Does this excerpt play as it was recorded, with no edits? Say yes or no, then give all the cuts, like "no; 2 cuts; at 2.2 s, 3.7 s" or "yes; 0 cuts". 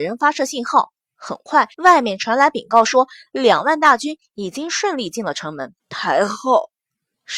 no; 2 cuts; at 1.7 s, 5.8 s